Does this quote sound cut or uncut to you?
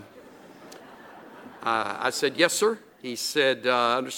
uncut